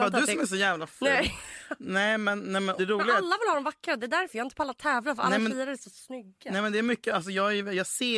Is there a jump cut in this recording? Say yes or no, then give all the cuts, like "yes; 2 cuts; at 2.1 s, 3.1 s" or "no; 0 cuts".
yes; 1 cut; at 2.8 s